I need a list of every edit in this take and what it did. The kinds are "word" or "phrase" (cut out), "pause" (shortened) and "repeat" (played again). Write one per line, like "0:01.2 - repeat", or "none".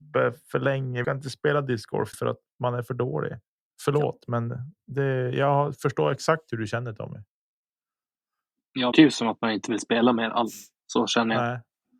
0:01.0 - phrase
0:02.1 - word
0:03.6 - pause
0:08.9 - word